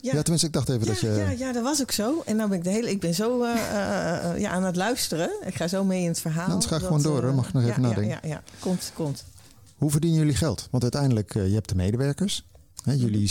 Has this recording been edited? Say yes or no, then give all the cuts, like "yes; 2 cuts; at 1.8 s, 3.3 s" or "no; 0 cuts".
no; 0 cuts